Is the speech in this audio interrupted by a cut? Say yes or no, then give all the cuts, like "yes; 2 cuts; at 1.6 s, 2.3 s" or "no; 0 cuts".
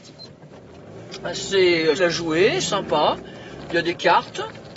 yes; 2 cuts; at 2.0 s, 2.6 s